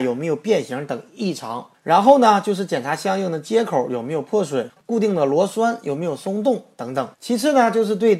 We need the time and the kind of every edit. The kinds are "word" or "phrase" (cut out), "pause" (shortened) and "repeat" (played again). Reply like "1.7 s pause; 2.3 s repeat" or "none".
7.1 s pause